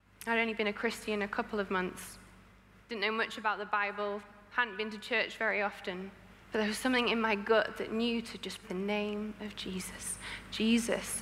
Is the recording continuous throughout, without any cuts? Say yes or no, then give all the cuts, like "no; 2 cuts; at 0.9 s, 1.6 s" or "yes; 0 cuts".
no; 2 cuts; at 6.4 s, 8.6 s